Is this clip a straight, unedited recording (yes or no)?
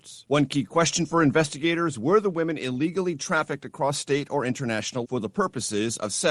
no